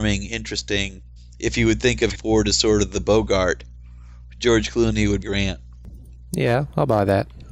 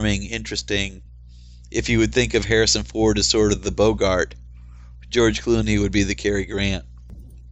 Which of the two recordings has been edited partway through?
first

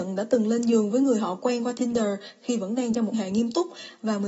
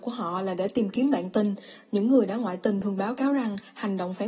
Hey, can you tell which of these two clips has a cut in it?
first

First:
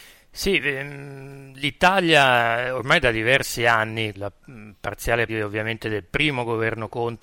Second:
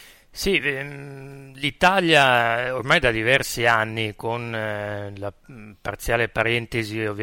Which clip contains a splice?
first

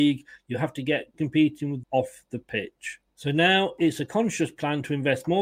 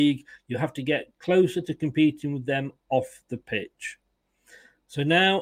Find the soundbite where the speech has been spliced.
first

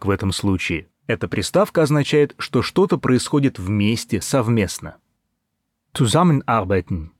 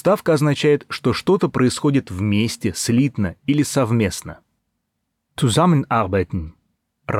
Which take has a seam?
first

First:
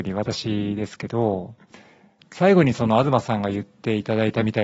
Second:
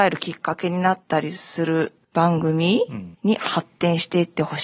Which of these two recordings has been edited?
second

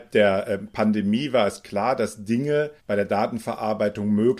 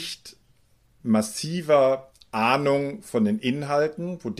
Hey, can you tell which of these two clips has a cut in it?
first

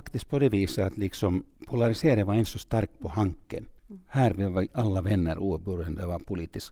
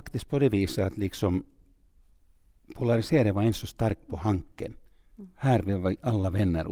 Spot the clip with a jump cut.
first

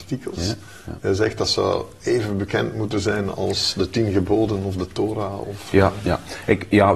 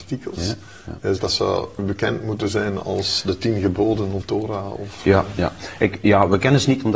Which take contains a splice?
second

